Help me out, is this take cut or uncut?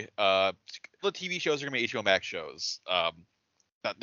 cut